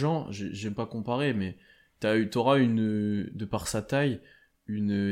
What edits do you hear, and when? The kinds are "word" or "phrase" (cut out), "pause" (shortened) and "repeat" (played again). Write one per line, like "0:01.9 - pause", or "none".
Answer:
none

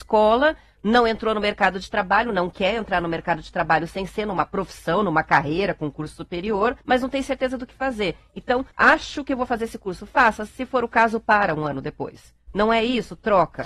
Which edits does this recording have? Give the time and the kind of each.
0:06.8 - pause
0:08.7 - pause

